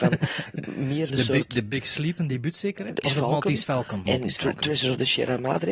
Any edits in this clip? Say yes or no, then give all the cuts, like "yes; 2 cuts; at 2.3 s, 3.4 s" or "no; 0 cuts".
yes; 4 cuts; at 1.1 s, 2.2 s, 3.0 s, 4.1 s